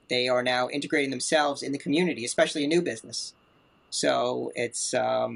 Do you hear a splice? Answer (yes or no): no